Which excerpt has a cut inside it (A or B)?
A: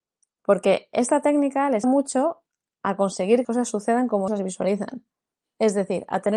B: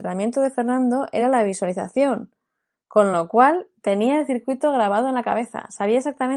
A